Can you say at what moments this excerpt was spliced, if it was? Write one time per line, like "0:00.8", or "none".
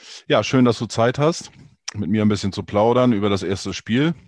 none